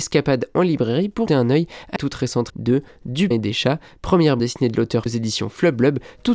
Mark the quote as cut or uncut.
cut